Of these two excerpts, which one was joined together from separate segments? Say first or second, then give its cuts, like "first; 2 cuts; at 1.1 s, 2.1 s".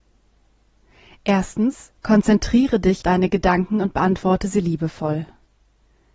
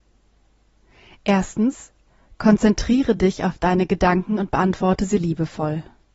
first; 2 cuts; at 2.0 s, 3.0 s